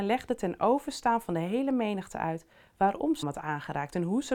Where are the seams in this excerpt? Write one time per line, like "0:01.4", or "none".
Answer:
0:03.2